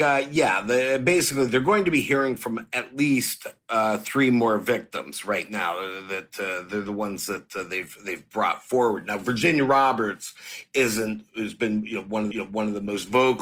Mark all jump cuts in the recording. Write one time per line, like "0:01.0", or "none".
0:12.3